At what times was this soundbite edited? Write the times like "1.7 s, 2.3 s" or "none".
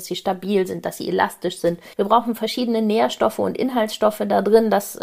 1.9 s